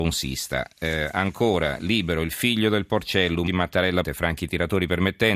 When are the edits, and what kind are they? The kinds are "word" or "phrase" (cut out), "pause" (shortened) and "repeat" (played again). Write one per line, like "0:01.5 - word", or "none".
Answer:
0:03.5 - word
0:04.0 - word